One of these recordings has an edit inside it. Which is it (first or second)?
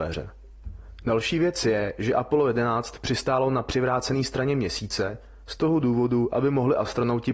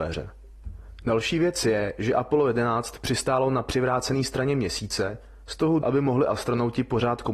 second